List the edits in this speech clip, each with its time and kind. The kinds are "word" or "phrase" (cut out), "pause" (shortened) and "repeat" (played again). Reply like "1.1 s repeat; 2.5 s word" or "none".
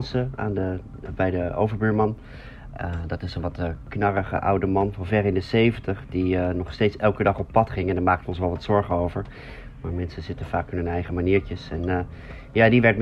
none

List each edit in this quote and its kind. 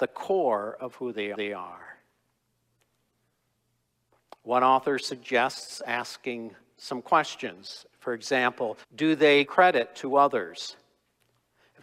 1.3 s repeat; 8.8 s pause; 9.4 s word

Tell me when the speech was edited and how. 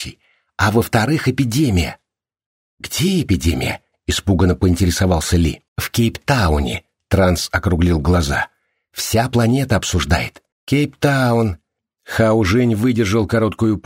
5.7 s pause; 10.5 s pause

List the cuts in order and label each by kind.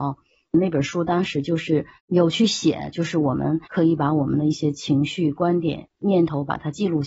2.0 s pause; 3.6 s pause

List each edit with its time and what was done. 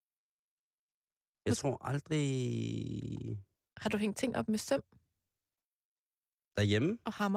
none

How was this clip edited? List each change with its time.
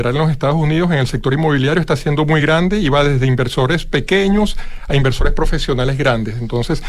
none

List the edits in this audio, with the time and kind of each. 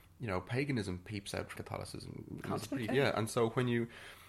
1.5 s word; 2.9 s word

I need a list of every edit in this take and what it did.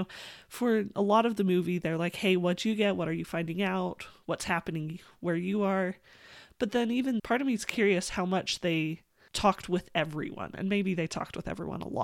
7.2 s word

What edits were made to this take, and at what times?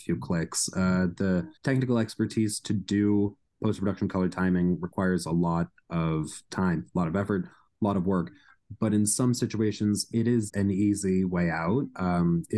1.6 s pause; 10.5 s word

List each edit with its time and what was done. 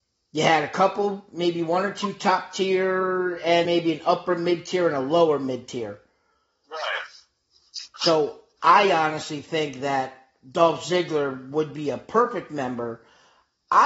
3.7 s word

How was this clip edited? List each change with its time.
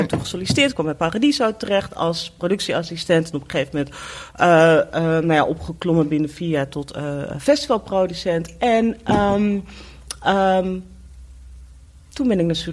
none

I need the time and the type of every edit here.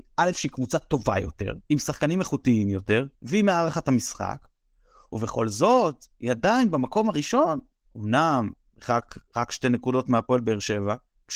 1.6 s pause; 3.1 s pause; 9.2 s pause

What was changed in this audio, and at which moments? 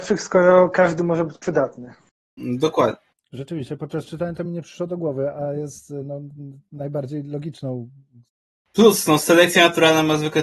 none

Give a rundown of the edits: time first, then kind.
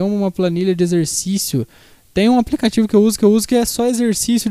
3.2 s repeat

